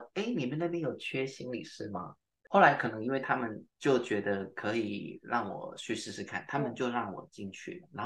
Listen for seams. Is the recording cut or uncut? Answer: cut